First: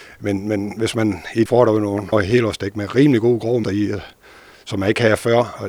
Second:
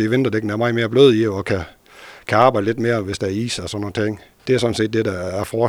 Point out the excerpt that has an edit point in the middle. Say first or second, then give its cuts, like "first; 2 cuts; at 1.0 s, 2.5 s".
first; 3 cuts; at 1.5 s, 2.1 s, 3.6 s